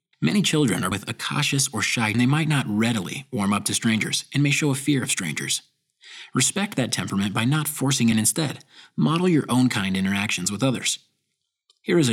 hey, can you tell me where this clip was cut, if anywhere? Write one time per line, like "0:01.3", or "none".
0:00.9
0:02.1
0:08.1

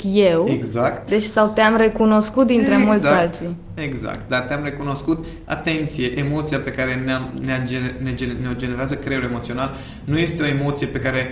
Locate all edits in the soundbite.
none

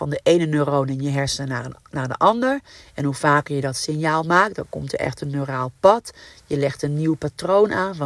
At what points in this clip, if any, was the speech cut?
none

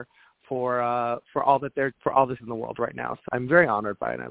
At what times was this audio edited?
0:01.9
0:02.4
0:03.3

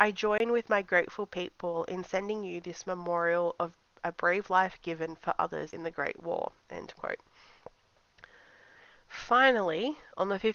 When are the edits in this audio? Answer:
none

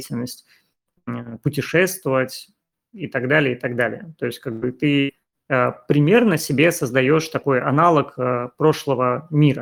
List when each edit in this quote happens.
none

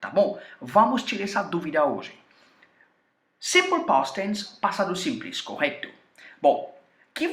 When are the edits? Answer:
none

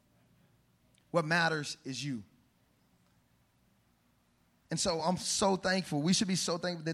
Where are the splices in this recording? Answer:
none

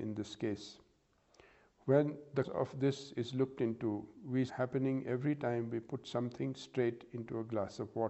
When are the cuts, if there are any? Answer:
0:02.4
0:04.5

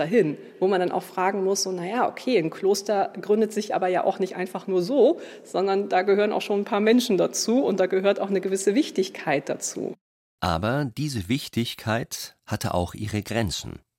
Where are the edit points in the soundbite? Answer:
none

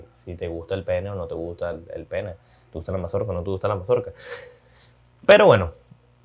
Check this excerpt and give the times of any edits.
none

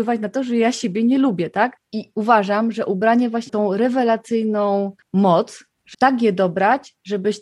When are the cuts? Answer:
0:03.5
0:05.9

